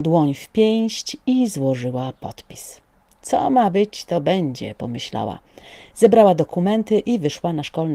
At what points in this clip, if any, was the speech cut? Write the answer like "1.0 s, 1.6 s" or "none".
none

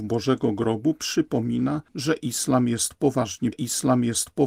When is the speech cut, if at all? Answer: 1.9 s, 3.5 s

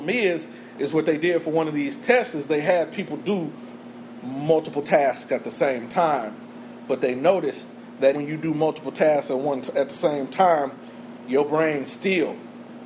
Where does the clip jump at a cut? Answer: 8.1 s

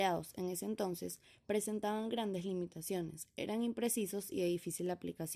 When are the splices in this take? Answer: none

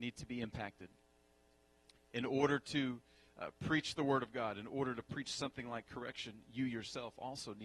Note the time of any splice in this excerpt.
none

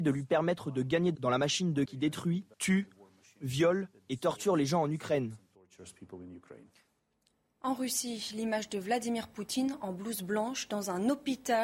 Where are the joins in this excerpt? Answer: 1.1 s, 1.8 s, 2.5 s

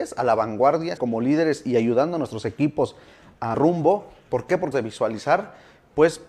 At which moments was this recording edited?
1.0 s, 3.5 s, 4.7 s

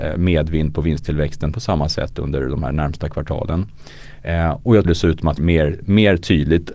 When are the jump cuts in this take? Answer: 1.5 s, 4.8 s, 5.4 s

